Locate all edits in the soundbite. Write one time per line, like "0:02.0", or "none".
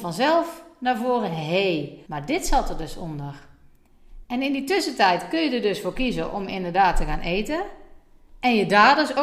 0:02.1